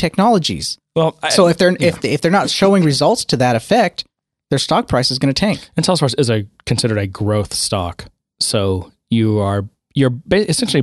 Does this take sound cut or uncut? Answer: uncut